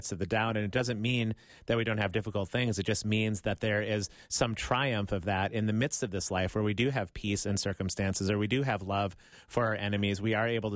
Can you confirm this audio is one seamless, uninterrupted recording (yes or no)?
yes